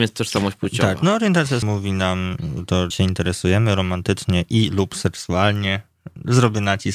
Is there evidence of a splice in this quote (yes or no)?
yes